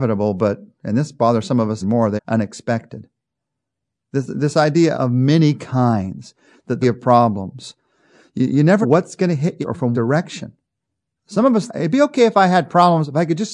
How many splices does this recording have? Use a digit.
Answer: 9